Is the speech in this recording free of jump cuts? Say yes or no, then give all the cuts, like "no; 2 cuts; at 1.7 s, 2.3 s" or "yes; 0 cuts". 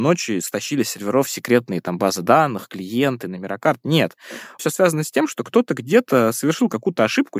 no; 1 cut; at 4.6 s